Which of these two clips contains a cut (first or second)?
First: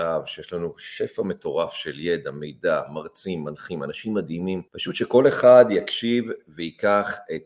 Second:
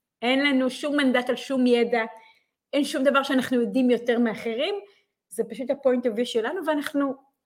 first